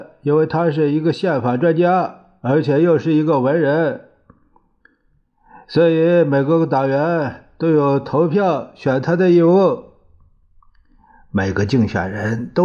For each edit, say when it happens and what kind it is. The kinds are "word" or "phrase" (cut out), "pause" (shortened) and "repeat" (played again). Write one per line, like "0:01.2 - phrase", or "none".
none